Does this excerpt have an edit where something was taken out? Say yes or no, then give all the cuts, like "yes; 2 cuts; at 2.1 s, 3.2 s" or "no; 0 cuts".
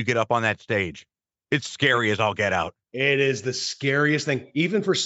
no; 0 cuts